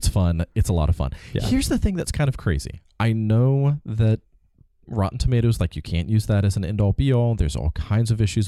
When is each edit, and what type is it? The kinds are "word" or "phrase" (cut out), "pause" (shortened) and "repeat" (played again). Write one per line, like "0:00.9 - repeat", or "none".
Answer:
none